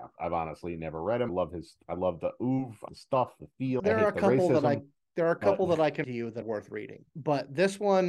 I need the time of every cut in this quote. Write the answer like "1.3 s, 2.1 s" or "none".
1.3 s, 2.9 s, 3.4 s, 3.8 s, 6.0 s, 6.4 s